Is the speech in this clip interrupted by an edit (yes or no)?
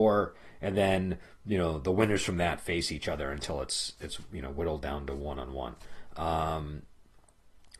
no